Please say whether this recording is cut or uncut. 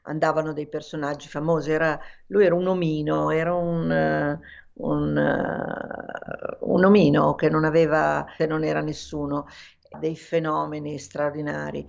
cut